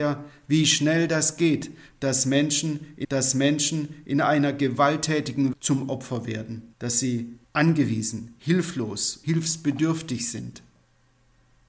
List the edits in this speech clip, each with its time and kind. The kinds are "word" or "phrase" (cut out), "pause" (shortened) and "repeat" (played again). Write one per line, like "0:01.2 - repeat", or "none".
0:03.0 - repeat
0:05.5 - word
0:06.7 - pause
0:07.4 - pause
0:09.2 - word